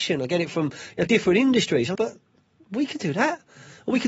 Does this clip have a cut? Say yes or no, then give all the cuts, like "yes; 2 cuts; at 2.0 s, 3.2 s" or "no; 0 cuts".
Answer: yes; 2 cuts; at 1.1 s, 1.9 s